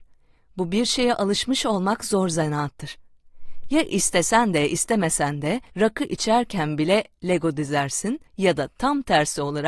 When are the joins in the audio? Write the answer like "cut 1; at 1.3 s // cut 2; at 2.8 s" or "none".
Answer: cut 1; at 5.7 s // cut 2; at 8.3 s